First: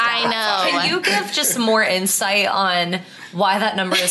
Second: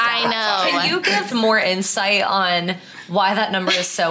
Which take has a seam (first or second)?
second